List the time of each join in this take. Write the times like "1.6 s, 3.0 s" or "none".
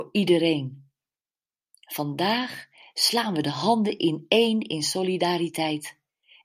none